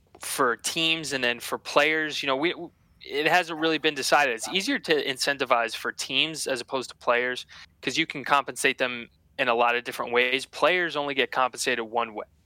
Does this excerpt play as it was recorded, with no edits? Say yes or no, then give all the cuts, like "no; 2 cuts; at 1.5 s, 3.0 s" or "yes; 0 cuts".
yes; 0 cuts